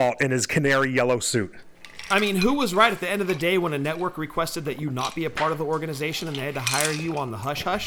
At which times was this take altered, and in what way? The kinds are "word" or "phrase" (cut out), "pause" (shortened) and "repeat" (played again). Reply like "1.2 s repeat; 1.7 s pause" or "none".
none